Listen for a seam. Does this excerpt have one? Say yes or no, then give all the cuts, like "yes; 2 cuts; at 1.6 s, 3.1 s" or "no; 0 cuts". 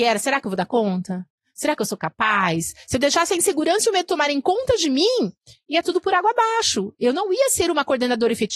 no; 0 cuts